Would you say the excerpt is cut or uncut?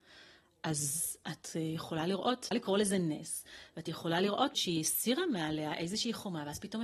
cut